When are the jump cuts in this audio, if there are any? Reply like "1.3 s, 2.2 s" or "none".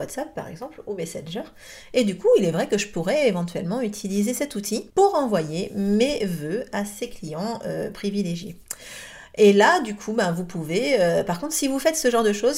4.9 s